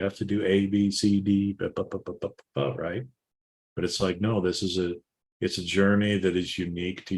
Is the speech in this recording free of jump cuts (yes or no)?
yes